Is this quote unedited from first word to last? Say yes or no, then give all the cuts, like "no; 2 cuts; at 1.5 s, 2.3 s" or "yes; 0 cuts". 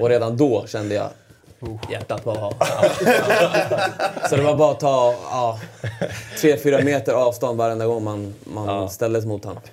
yes; 0 cuts